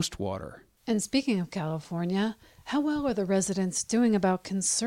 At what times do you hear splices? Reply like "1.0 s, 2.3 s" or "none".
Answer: none